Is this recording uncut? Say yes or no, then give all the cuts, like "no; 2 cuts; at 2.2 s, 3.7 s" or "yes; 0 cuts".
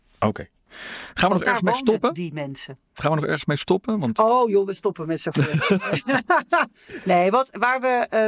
yes; 0 cuts